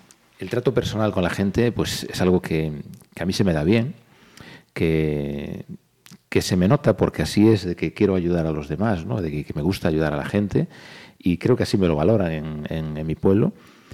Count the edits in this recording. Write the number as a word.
one